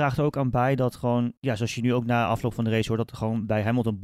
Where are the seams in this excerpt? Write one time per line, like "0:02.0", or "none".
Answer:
0:01.4